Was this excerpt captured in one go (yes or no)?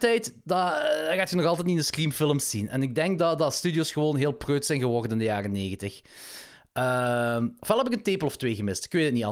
yes